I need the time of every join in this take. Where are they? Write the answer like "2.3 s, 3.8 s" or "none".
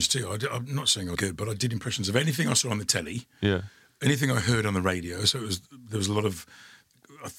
1.2 s

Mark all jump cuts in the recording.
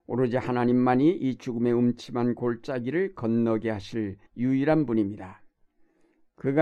4.3 s

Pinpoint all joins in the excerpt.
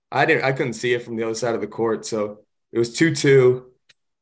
none

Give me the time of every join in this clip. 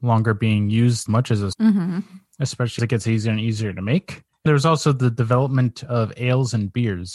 1.1 s, 1.5 s, 2.8 s, 4.5 s

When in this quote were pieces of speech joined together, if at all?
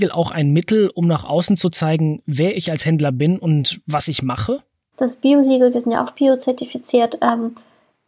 none

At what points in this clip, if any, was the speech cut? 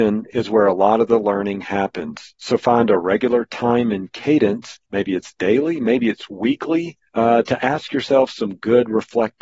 7.1 s

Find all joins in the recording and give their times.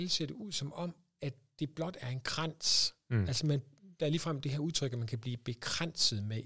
none

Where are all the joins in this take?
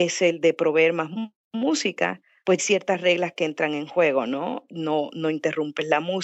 2.6 s

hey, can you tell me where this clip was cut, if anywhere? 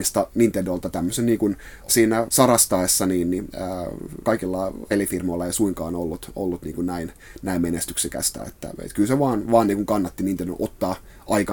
1.9 s

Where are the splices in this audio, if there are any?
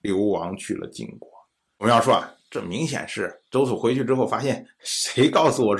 none

